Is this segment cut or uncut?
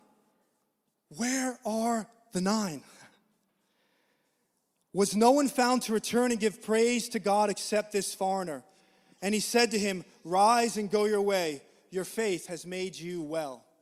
uncut